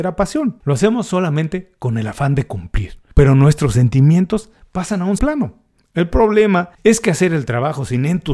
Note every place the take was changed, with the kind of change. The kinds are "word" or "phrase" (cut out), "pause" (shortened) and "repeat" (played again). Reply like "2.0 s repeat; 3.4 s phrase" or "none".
5.2 s word